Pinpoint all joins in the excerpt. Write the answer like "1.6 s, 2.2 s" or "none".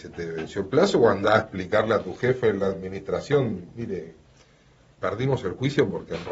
none